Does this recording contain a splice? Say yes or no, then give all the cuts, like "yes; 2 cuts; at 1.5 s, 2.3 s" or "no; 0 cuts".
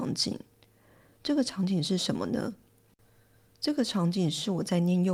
no; 0 cuts